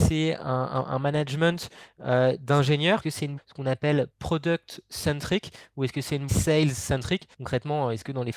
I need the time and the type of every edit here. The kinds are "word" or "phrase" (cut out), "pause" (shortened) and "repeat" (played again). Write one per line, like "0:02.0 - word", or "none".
0:03.0 - word
0:03.4 - phrase
0:04.1 - pause
0:06.3 - phrase
0:07.3 - pause